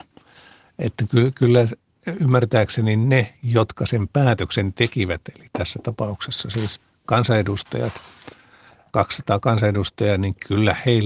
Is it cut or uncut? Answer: uncut